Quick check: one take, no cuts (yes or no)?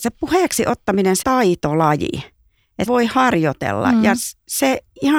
no